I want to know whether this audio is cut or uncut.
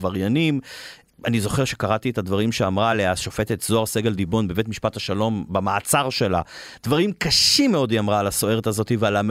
uncut